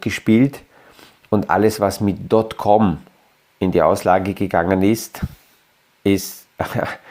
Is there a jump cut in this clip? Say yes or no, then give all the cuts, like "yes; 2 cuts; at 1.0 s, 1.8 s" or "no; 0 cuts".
no; 0 cuts